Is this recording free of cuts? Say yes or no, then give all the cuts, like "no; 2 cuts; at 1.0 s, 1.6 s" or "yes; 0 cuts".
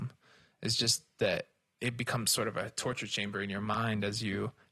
yes; 0 cuts